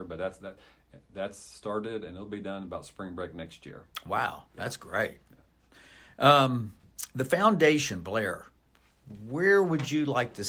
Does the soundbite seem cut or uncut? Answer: uncut